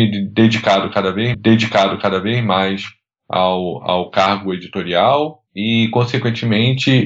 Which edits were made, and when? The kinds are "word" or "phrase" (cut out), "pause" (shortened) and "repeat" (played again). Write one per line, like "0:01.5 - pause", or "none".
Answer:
0:01.3 - repeat
0:05.5 - pause